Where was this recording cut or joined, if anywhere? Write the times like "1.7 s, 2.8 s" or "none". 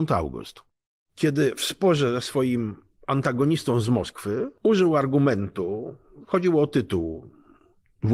none